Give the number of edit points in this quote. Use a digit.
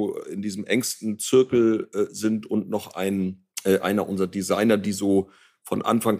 1